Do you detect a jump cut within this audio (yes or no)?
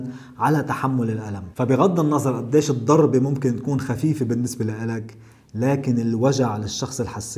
no